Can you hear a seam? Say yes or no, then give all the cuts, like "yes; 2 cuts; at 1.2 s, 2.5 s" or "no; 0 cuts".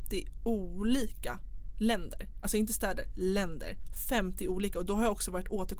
no; 0 cuts